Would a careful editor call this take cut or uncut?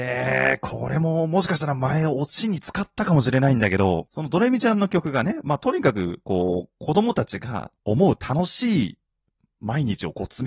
uncut